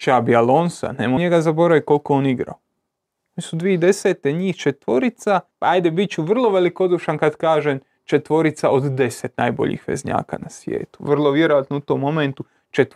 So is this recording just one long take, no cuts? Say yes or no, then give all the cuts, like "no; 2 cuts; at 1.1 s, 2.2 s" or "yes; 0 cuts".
no; 2 cuts; at 1.2 s, 5.5 s